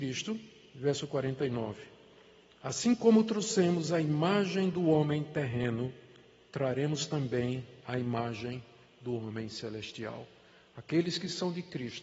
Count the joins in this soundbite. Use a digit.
0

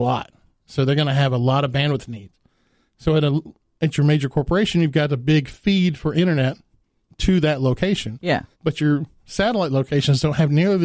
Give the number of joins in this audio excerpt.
1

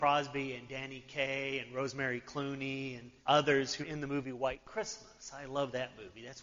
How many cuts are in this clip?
2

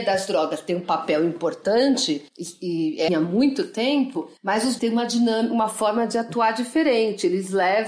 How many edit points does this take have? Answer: 4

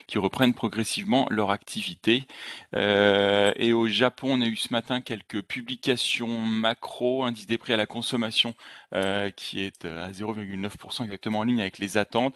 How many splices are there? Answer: 0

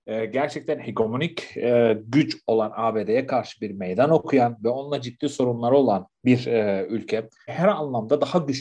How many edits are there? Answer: 1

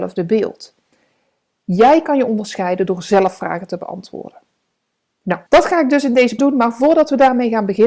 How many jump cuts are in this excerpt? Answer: 2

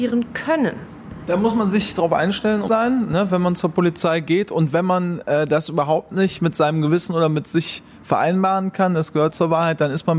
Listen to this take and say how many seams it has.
2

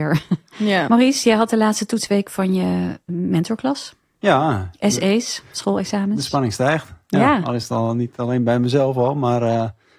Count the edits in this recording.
1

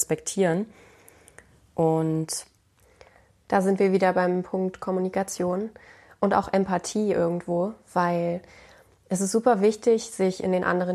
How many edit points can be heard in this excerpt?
0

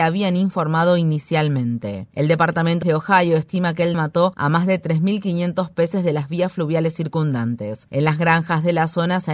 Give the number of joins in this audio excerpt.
2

